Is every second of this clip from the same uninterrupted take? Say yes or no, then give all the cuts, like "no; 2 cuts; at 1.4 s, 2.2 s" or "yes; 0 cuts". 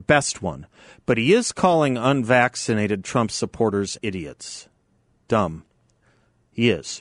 no; 1 cut; at 4.0 s